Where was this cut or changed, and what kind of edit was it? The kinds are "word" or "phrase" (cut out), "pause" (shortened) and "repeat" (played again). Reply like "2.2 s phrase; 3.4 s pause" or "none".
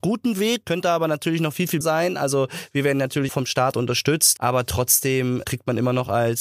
1.8 s word; 3.3 s word; 4.4 s word; 5.4 s word